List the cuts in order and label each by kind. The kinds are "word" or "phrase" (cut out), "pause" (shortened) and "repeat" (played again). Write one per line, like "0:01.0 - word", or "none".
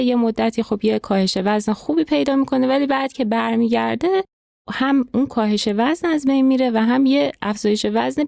none